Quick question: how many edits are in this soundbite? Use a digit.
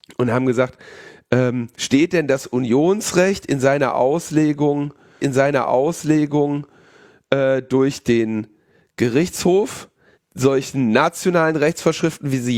3